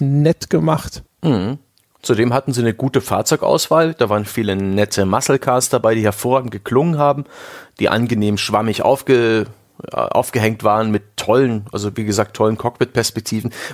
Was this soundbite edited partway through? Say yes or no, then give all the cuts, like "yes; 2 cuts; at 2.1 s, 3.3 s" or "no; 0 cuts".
no; 0 cuts